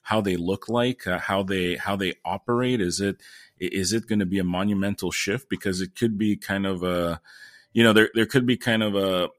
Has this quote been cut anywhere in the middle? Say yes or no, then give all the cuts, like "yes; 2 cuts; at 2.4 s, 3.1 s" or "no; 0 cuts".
no; 0 cuts